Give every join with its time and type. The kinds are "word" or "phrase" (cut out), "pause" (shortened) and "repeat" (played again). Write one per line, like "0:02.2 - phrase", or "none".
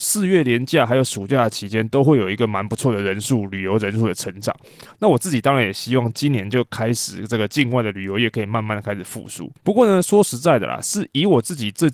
0:09.6 - pause

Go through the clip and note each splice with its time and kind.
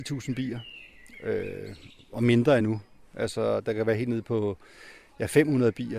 none

